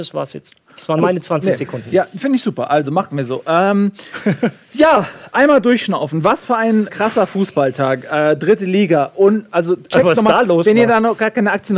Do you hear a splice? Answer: yes; 1 cut; at 6.9 s

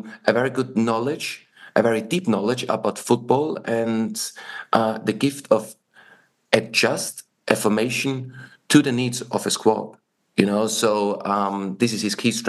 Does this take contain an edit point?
no; 0 cuts

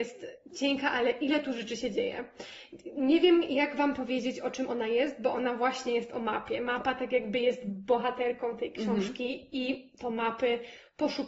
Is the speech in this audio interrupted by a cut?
no; 0 cuts

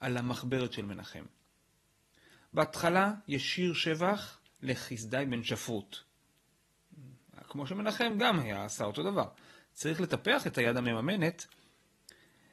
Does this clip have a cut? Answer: no; 0 cuts

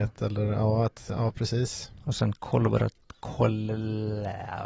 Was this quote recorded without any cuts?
yes; 0 cuts

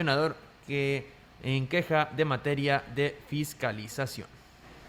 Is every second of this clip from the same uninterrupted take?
yes; 0 cuts

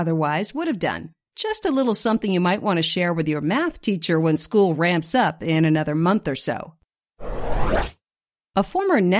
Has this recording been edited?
no; 0 cuts

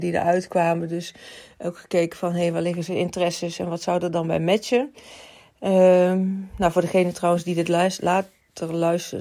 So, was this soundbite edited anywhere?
no; 0 cuts

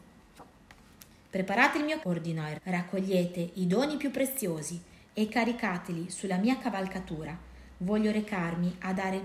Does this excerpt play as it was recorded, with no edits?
no; 3 cuts; at 1.2 s, 2.0 s, 2.6 s

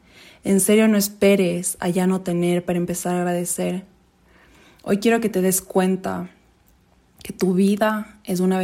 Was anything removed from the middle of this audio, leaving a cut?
no; 0 cuts

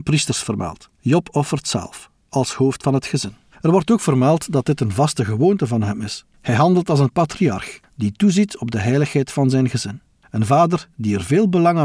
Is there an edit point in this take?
yes; 3 cuts; at 0.9 s, 3.5 s, 6.3 s

